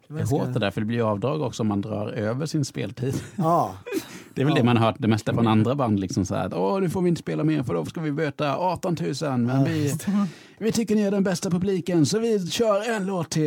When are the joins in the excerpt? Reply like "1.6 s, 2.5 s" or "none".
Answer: none

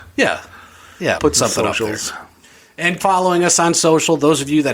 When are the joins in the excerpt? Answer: 1.2 s, 3.0 s

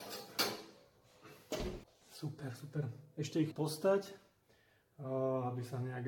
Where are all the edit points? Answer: 1.8 s, 3.5 s

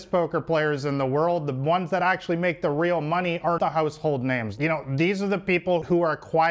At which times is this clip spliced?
3.6 s

